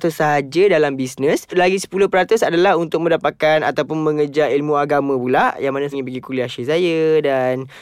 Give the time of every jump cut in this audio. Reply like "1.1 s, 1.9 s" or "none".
5.9 s